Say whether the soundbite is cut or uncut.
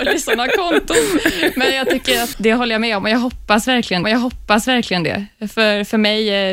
cut